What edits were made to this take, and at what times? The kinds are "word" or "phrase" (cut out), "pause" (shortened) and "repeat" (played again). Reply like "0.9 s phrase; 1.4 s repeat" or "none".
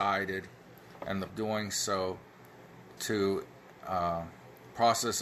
1.3 s phrase; 3.0 s word